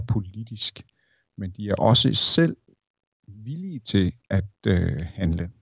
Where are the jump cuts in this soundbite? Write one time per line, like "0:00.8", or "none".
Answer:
none